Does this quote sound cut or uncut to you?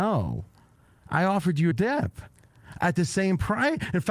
cut